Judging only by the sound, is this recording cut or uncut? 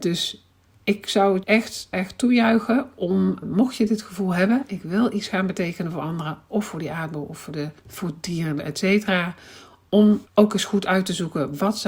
cut